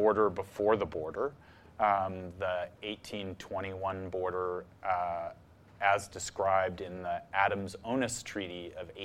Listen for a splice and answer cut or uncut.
uncut